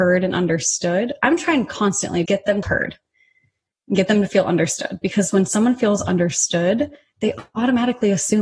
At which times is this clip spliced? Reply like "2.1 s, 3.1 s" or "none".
2.3 s, 2.6 s